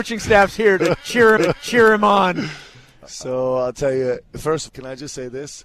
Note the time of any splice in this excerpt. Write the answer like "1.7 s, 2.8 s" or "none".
1.4 s, 4.7 s